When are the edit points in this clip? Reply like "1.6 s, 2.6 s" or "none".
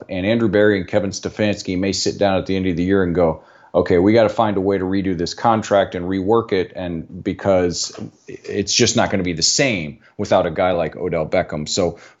none